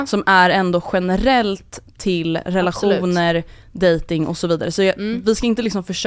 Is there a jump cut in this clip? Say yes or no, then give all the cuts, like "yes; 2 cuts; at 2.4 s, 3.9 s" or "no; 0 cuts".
no; 0 cuts